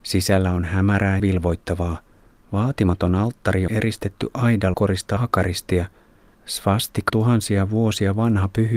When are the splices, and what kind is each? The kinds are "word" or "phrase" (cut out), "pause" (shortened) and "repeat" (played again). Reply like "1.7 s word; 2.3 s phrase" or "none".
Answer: 1.2 s word; 3.7 s word; 4.7 s word; 5.2 s word; 7.1 s word